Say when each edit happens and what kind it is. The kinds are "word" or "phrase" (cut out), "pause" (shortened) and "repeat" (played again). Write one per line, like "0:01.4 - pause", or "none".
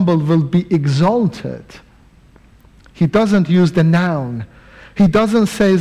none